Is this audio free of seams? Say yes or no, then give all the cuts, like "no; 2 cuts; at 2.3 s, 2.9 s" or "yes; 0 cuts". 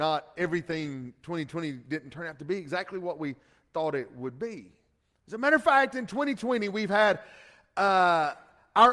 yes; 0 cuts